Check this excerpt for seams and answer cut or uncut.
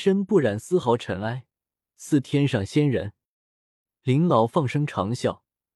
uncut